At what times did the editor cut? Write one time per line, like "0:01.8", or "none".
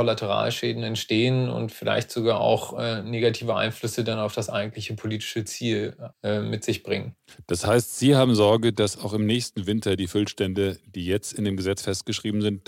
0:06.1